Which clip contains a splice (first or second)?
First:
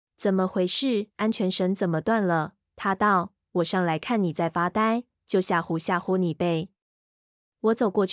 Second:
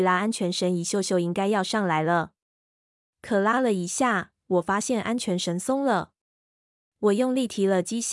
first